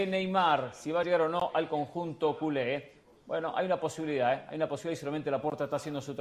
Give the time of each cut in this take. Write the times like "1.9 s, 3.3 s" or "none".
none